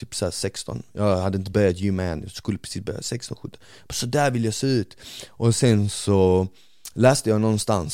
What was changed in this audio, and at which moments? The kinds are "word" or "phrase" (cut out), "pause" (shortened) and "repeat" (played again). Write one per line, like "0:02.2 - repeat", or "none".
none